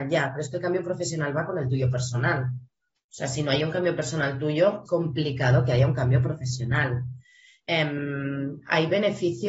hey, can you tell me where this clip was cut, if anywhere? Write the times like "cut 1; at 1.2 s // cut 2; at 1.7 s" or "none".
cut 1; at 4.9 s

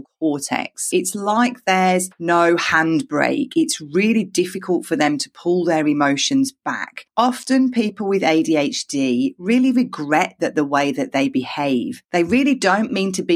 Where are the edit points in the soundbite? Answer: cut 1; at 12.0 s

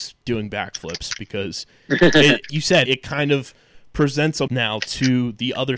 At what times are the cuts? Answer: cut 1; at 2.5 s // cut 2; at 2.9 s // cut 3; at 4.5 s

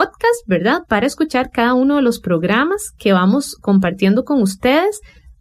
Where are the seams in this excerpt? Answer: none

